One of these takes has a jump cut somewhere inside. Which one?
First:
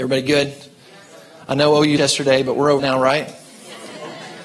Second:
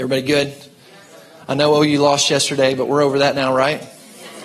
first; 2 cuts; at 2.0 s, 2.8 s

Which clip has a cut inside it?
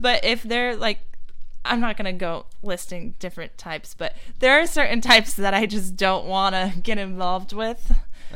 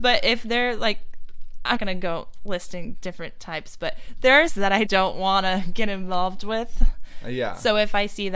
second; 3 cuts; at 1.8 s, 4.5 s, 4.9 s

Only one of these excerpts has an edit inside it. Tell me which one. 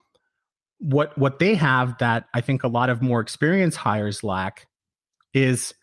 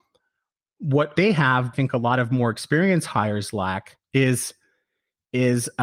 second; 3 cuts; at 1.2 s, 1.7 s, 4.0 s

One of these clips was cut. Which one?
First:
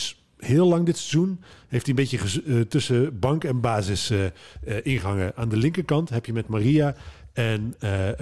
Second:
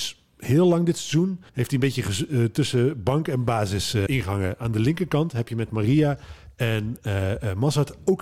second; 2 cuts; at 1.5 s, 4.1 s

